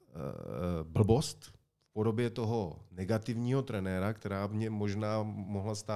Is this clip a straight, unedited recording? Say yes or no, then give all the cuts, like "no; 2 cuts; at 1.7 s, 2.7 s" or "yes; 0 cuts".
no; 1 cut; at 2.9 s